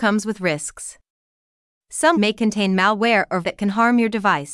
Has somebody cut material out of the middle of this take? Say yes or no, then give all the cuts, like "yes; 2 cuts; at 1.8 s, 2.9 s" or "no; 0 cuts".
yes; 2 cuts; at 2.1 s, 3.4 s